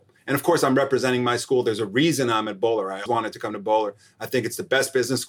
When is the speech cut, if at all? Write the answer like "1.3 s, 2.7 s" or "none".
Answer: 3.1 s